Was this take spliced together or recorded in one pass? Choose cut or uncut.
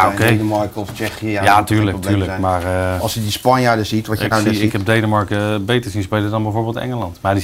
uncut